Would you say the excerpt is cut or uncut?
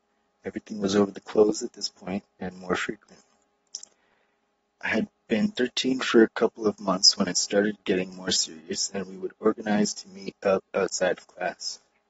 uncut